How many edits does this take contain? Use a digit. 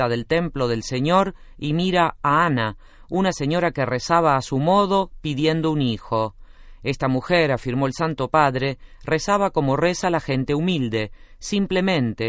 0